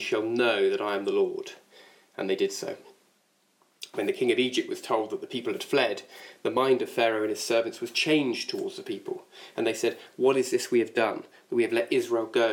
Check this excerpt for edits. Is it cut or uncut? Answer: uncut